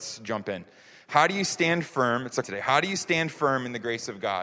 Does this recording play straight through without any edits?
no; 1 cut; at 2.4 s

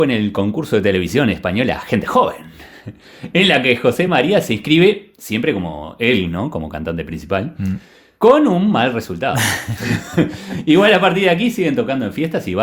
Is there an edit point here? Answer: no; 0 cuts

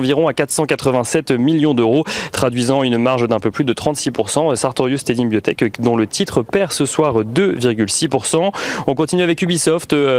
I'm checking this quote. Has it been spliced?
no; 0 cuts

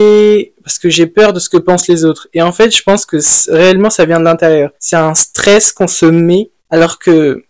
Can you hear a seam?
yes; 2 cuts; at 4.8 s, 6.6 s

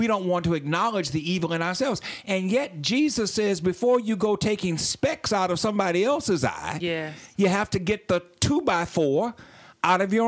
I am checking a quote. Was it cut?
no; 0 cuts

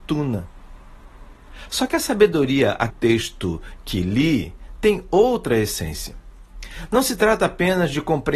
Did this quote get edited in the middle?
yes; 1 cut; at 2.9 s

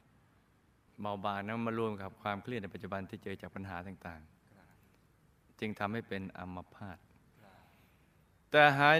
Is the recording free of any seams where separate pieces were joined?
yes; 0 cuts

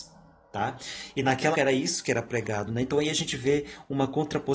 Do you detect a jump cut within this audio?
yes; 1 cut; at 1.5 s

